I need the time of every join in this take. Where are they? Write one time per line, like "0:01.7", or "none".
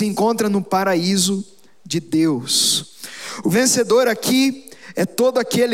none